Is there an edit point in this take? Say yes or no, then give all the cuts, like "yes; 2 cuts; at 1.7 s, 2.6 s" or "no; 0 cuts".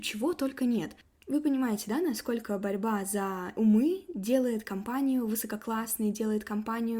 no; 0 cuts